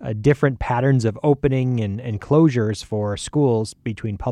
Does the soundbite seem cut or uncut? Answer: uncut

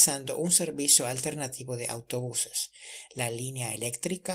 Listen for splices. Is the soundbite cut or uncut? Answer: uncut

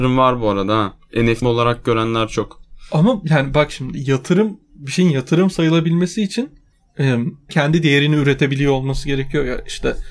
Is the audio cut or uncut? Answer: cut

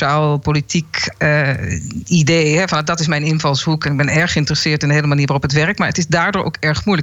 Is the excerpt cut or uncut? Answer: uncut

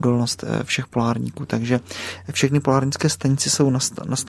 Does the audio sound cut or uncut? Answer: uncut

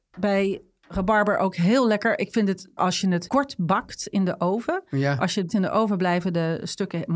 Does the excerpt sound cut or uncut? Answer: cut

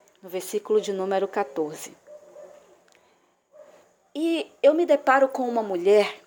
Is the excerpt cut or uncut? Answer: uncut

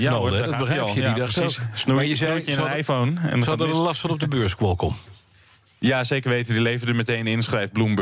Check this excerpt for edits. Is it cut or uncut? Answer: uncut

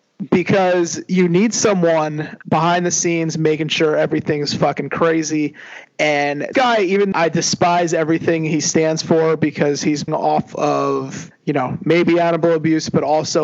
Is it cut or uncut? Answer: cut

